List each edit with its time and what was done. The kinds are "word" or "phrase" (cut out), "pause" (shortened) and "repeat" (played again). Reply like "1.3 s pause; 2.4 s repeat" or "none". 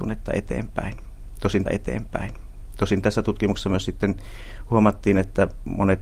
1.7 s repeat